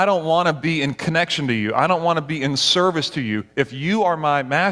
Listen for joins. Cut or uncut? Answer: uncut